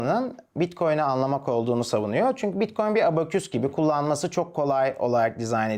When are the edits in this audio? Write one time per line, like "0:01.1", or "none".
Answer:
none